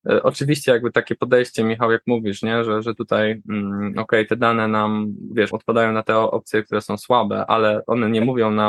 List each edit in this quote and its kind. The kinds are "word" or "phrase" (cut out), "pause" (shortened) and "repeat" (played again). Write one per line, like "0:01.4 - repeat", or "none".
0:05.5 - word